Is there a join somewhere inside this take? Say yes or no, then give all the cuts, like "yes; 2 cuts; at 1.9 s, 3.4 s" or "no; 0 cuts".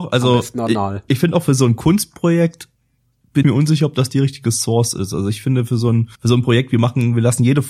yes; 3 cuts; at 1.1 s, 3.4 s, 6.1 s